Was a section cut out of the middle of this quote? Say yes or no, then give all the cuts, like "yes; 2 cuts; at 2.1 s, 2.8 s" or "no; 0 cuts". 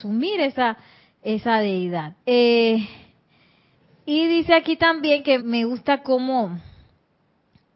yes; 2 cuts; at 2.2 s, 5.4 s